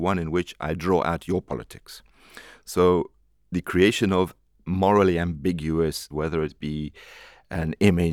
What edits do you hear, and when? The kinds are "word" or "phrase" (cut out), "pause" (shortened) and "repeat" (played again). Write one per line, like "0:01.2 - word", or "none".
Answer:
0:06.1 - word